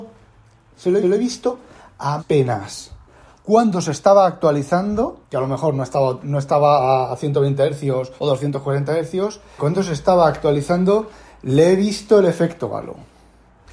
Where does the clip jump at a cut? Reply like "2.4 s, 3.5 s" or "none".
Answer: 1.0 s, 2.2 s, 5.2 s, 8.2 s, 9.6 s